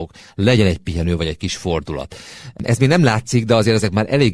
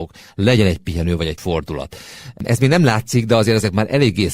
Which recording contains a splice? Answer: second; 1 cut; at 1.4 s

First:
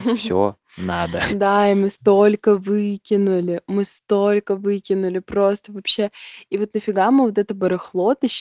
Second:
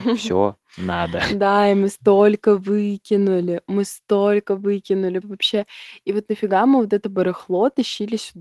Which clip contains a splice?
second; 1 cut; at 5.2 s

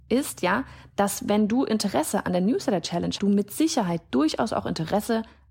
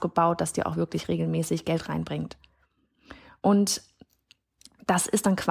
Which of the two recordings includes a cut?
first; 1 cut; at 3.2 s

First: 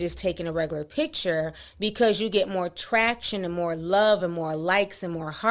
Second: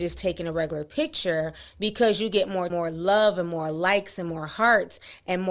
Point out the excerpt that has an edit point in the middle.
second; 1 cut; at 2.7 s

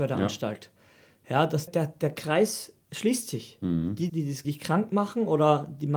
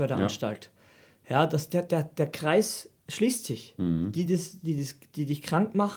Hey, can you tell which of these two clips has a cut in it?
first; 3 cuts; at 1.7 s, 4.1 s, 4.4 s

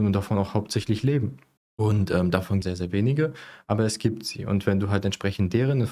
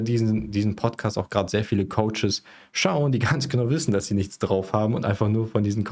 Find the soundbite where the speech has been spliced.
first; 2 cuts; at 1.6 s, 2.6 s

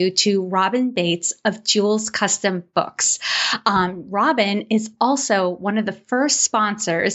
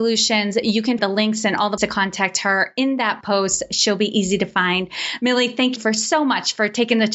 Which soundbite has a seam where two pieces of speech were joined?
second; 4 cuts; at 1.0 s, 1.8 s, 3.2 s, 5.8 s

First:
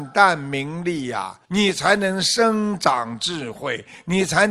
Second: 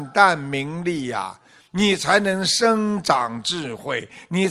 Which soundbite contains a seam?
first; 1 cut; at 1.4 s

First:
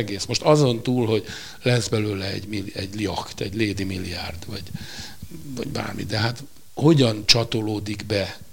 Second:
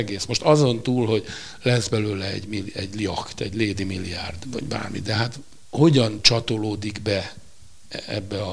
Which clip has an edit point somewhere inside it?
second; 1 cut; at 4.4 s

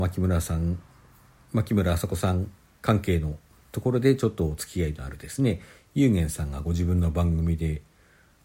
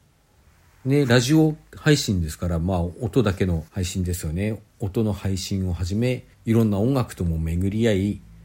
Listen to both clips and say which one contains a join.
second; 2 cuts; at 3.7 s, 6.3 s

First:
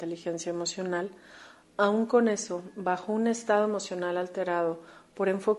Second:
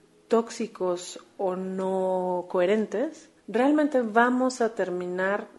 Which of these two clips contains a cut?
second; 1 cut; at 3.4 s

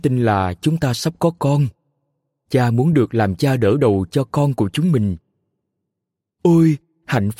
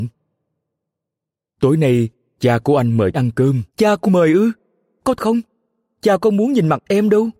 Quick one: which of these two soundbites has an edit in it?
second; 4 cuts; at 3.1 s, 3.7 s, 4.1 s, 5.2 s

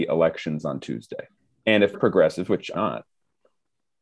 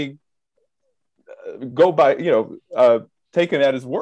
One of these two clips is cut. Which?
first; 3 cuts; at 1.4 s, 1.9 s, 2.7 s

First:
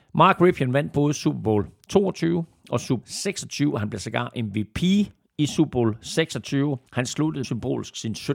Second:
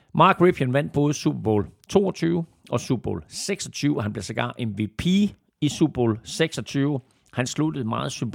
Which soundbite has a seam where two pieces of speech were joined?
first; 3 cuts; at 3.0 s, 6.9 s, 7.4 s

